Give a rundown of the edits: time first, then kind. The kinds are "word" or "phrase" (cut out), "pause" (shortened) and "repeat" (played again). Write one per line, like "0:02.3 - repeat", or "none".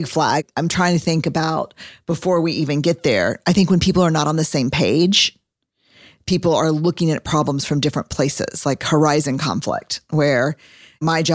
none